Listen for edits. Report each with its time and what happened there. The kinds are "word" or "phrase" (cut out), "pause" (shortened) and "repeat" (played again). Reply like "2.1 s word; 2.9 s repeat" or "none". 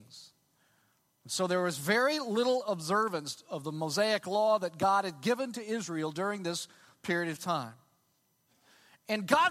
none